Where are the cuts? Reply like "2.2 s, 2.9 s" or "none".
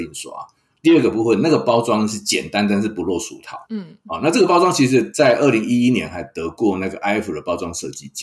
3.7 s